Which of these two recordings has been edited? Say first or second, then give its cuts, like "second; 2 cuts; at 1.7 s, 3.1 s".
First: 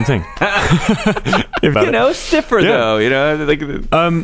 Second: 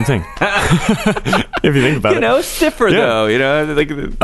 first; 1 cut; at 1.7 s